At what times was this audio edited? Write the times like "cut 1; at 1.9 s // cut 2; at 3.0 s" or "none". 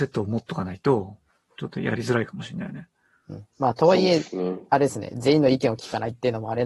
cut 1; at 3.5 s